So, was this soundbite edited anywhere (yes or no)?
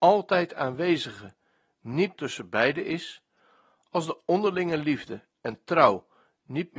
yes